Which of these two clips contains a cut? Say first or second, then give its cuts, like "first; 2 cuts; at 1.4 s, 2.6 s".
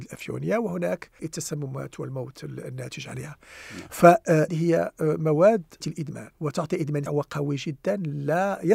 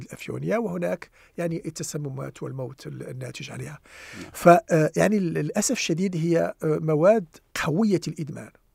first; 5 cuts; at 1.2 s, 4.5 s, 5.8 s, 6.3 s, 7.1 s